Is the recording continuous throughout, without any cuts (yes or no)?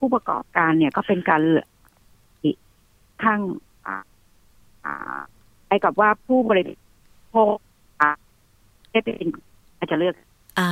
yes